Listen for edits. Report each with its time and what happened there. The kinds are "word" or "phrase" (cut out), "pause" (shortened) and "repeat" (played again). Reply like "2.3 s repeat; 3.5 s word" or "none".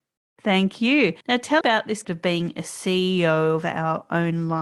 1.2 s pause; 1.6 s word; 2.0 s word